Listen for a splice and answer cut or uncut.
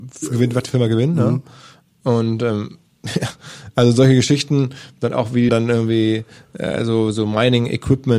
cut